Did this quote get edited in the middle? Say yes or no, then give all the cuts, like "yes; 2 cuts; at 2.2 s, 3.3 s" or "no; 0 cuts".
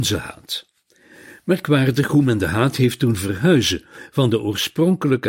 no; 0 cuts